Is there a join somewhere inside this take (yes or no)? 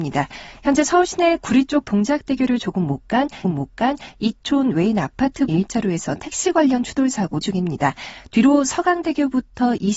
yes